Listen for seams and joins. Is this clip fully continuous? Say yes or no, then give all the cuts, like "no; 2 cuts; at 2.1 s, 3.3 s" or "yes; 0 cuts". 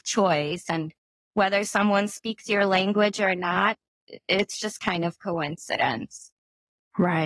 yes; 0 cuts